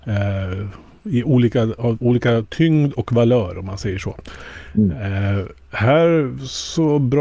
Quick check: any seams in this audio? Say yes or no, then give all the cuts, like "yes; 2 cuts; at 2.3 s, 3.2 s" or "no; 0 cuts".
no; 0 cuts